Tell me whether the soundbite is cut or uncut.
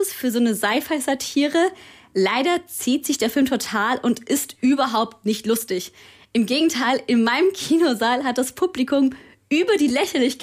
uncut